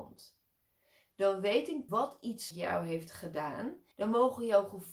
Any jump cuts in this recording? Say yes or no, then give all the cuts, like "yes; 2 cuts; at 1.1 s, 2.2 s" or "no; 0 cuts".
yes; 3 cuts; at 1.9 s, 2.5 s, 3.9 s